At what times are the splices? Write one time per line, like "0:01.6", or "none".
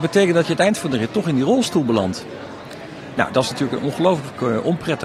none